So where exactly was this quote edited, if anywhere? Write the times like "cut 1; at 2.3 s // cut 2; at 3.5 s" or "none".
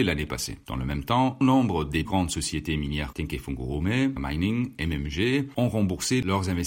cut 1; at 1.4 s // cut 2; at 2.0 s // cut 3; at 3.1 s // cut 4; at 4.2 s